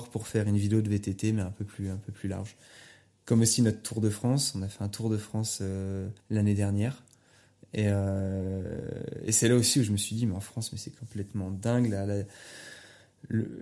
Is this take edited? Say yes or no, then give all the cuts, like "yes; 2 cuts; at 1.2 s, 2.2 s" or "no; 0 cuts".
yes; 1 cut; at 6.2 s